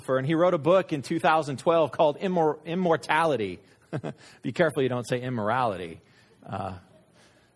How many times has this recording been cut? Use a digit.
0